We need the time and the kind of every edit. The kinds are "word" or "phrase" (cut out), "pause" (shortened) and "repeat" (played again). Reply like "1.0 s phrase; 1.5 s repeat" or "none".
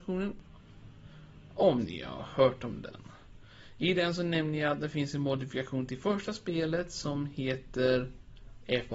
none